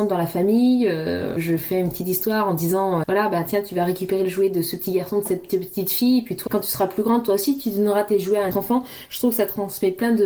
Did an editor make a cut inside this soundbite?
yes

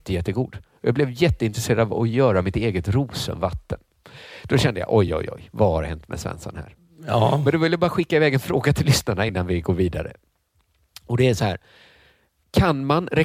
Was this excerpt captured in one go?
yes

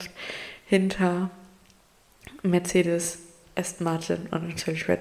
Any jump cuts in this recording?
yes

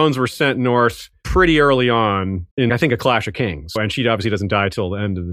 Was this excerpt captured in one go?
no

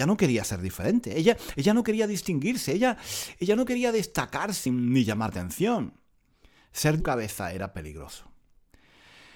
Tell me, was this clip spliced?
yes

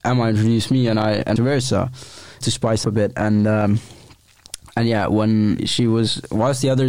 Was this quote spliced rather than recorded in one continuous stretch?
yes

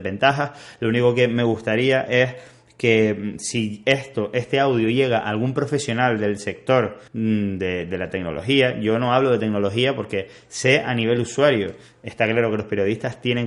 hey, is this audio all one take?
no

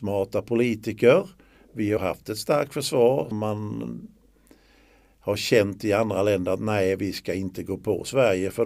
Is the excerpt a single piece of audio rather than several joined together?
no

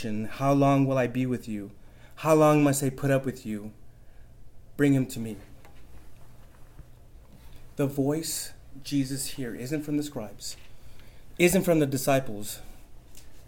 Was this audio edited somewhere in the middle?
no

